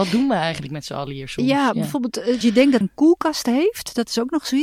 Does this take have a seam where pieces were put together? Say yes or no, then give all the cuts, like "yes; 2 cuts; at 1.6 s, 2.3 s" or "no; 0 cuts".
yes; 2 cuts; at 2.4 s, 2.8 s